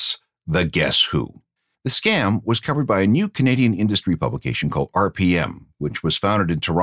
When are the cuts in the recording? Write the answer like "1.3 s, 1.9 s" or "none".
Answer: 1.6 s